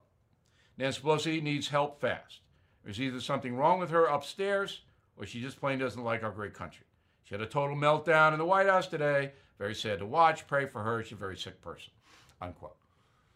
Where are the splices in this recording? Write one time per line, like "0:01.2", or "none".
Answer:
none